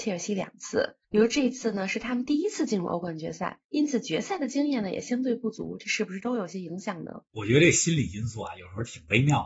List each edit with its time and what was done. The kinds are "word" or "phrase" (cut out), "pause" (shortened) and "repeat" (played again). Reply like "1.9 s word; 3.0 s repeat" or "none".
1.0 s pause